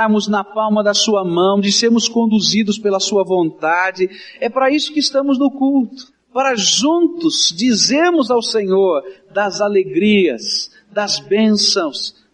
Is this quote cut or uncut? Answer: uncut